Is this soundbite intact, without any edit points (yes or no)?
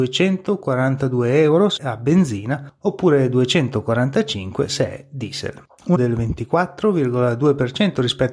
no